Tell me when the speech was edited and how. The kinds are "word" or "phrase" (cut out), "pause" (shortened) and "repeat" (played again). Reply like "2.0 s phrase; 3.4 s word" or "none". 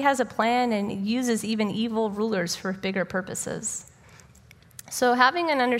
none